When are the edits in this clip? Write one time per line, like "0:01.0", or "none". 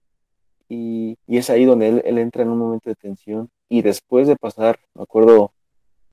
0:01.2
0:04.8

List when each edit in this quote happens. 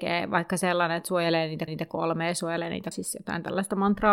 0:01.7
0:02.9

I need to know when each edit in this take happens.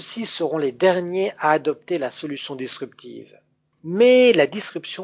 none

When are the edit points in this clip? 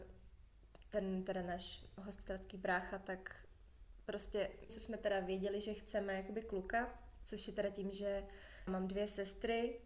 0:04.7
0:08.7

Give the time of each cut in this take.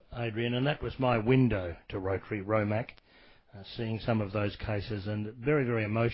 none

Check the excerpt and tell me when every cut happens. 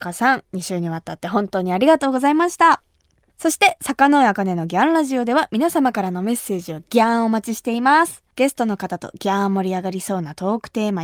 none

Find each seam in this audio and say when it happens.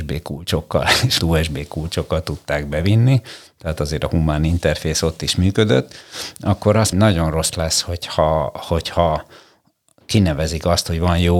0:01.2
0:06.9
0:07.5

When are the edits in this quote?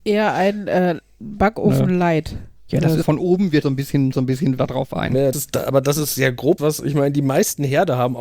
0:03.0
0:03.6
0:04.1
0:04.6
0:05.3
0:06.6

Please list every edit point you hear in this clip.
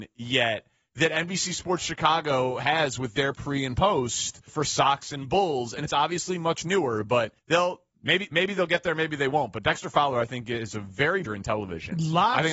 0:04.5
0:07.4
0:11.2

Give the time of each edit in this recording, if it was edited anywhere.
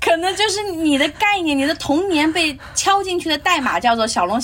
none

